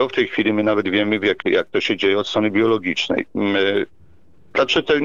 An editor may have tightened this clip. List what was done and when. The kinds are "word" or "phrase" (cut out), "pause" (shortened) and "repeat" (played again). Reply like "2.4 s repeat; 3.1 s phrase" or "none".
1.4 s word